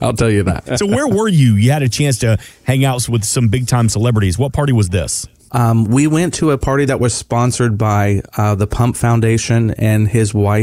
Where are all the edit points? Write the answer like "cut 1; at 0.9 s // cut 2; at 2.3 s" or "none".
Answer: none